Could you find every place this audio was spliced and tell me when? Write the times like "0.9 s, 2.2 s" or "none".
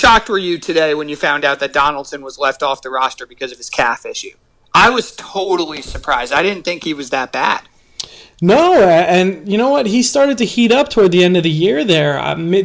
none

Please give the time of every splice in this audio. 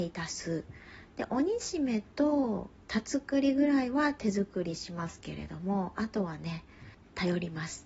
none

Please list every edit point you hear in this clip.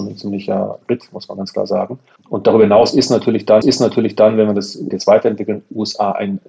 2.2 s, 3.6 s, 4.9 s

